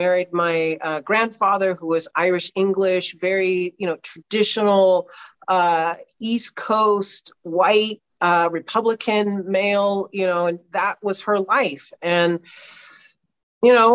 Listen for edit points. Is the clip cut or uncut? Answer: uncut